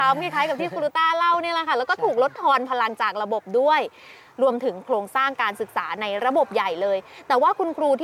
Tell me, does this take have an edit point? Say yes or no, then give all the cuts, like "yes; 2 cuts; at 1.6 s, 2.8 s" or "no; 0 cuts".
no; 0 cuts